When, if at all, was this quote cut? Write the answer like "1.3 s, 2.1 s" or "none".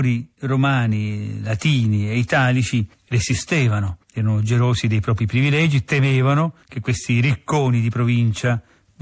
4.0 s, 6.6 s